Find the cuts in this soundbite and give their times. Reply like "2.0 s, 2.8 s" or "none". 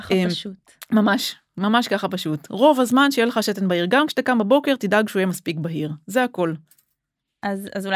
none